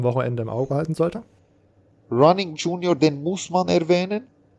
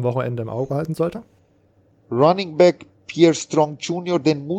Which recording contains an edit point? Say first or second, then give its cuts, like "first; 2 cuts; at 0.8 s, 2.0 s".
first; 1 cut; at 2.5 s